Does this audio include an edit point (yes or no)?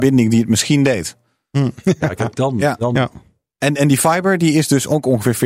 no